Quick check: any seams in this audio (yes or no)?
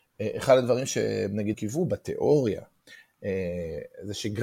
yes